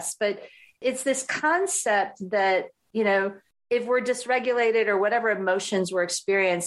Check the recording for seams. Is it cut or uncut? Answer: uncut